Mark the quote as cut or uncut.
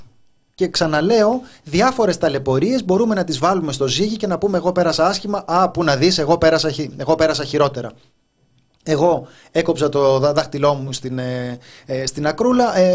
uncut